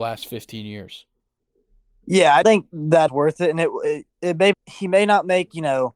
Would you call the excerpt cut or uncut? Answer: cut